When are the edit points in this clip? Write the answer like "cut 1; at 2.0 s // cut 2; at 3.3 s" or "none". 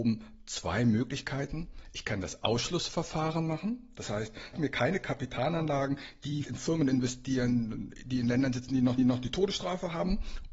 cut 1; at 4.5 s // cut 2; at 6.4 s // cut 3; at 9.0 s